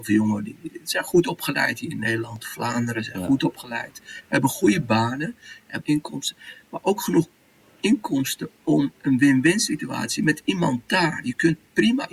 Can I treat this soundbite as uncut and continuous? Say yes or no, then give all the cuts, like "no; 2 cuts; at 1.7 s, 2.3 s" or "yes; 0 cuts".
no; 1 cut; at 5.8 s